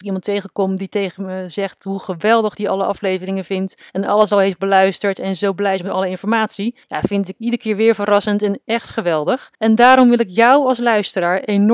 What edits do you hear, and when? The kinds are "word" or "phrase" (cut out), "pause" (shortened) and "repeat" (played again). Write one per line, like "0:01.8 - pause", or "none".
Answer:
0:03.9 - pause
0:06.8 - pause
0:09.5 - pause

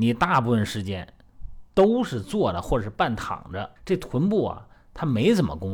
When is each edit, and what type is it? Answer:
0:01.7 - pause
0:03.8 - pause

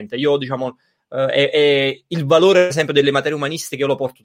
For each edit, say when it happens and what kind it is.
0:02.7 - word

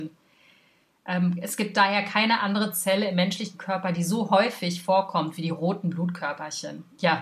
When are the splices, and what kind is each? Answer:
none

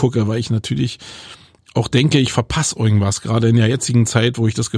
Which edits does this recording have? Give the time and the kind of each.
none

